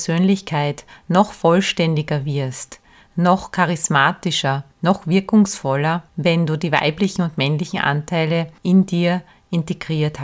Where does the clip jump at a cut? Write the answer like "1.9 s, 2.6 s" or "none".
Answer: 4.7 s, 6.1 s, 8.6 s